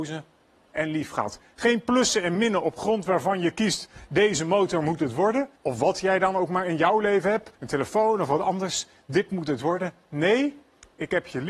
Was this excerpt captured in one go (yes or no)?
no